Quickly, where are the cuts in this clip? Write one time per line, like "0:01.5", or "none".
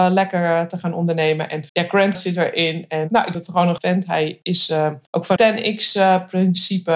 0:01.7
0:02.1
0:03.3
0:03.8
0:05.1
0:05.4

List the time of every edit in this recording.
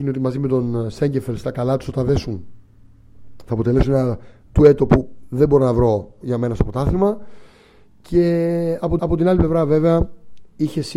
0:06.2
0:09.0

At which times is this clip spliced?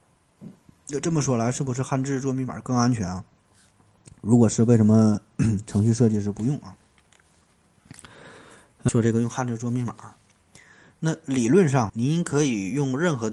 0:08.9
0:11.9

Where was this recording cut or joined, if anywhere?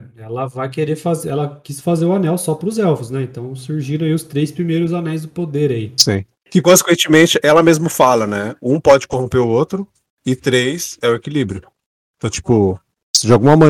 none

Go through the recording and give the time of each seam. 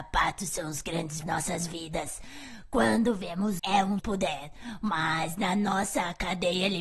0:01.2
0:03.6
0:04.0

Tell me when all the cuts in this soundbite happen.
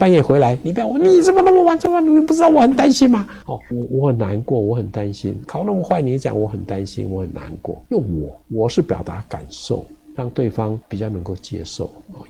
0:03.4
0:05.4
0:07.9
0:08.4
0:10.1

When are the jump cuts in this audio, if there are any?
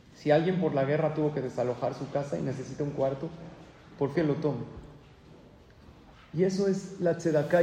0:04.1

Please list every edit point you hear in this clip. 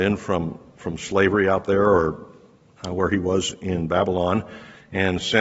none

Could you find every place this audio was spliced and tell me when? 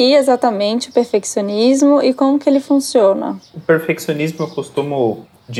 0:03.5

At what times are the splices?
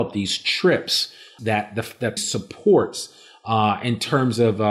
0:01.4
0:02.2

